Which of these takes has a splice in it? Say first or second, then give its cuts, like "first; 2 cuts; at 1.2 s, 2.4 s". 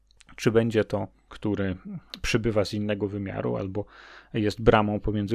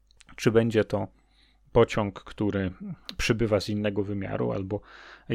first; 1 cut; at 1.3 s